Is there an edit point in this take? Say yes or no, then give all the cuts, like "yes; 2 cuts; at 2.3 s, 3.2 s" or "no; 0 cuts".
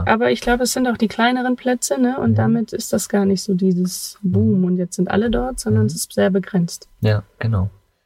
no; 0 cuts